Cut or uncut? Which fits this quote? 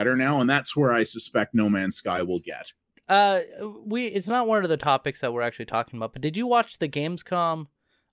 uncut